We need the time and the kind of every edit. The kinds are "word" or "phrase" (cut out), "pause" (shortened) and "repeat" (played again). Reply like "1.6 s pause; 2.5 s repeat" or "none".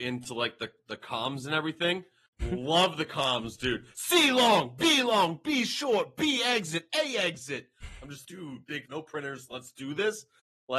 8.2 s word; 8.9 s word

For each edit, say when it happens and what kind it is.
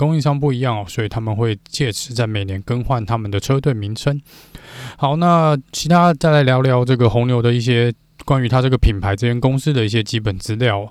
5.7 s pause

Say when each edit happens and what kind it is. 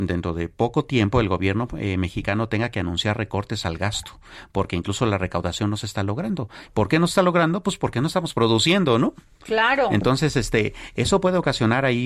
none

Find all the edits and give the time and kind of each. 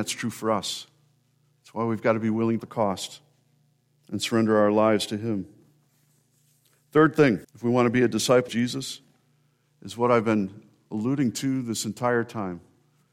2.6 s phrase; 5.9 s pause; 7.4 s pause; 8.5 s word

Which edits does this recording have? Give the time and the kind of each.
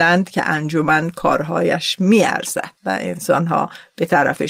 2.8 s pause

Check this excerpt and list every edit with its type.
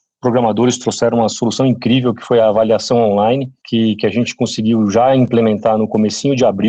3.6 s pause

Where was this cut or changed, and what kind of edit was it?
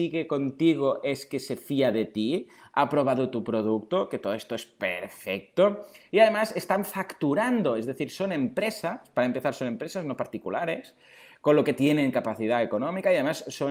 none

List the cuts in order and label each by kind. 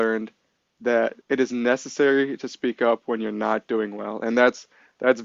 1.2 s pause

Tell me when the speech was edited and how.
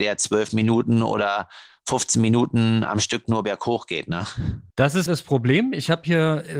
4.7 s pause; 5.1 s word

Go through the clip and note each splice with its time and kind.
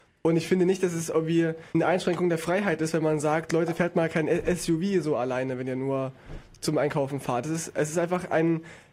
1.7 s pause

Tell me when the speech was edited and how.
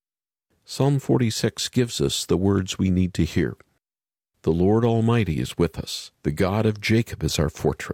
6.1 s pause

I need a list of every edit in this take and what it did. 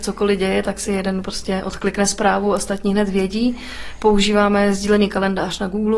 none

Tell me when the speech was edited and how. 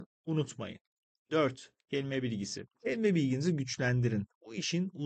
2.7 s pause

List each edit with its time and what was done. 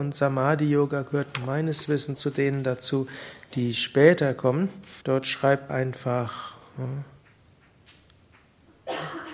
2.2 s word; 5.0 s pause; 5.7 s word

